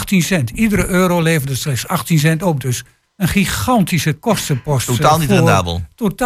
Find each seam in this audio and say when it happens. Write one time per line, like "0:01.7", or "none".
none

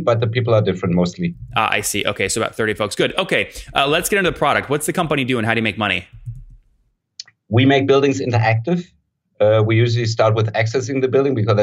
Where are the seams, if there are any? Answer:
none

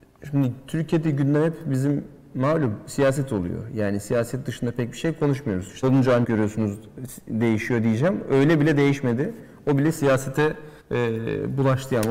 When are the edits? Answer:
0:05.8
0:06.2
0:10.8

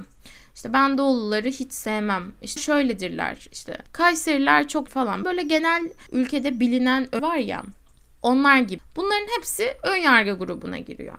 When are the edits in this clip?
0:02.6
0:03.9
0:04.9
0:05.2
0:06.1
0:07.2

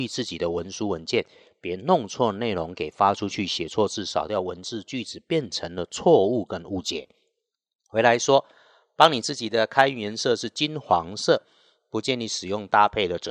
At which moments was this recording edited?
none

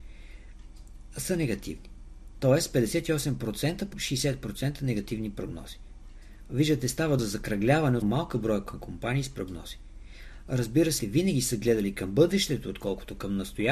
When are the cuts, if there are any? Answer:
0:03.9
0:07.2
0:08.0
0:11.0

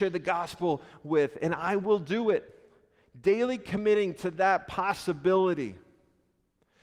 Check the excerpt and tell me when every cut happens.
none

